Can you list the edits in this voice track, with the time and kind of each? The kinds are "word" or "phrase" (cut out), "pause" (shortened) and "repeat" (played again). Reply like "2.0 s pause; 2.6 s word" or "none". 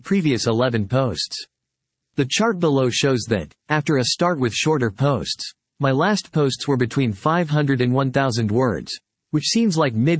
none